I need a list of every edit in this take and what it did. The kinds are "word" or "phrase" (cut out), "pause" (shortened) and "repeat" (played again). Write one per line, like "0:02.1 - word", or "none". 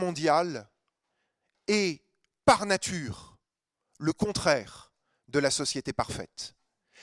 none